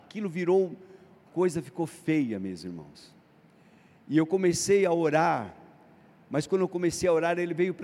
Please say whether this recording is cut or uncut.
cut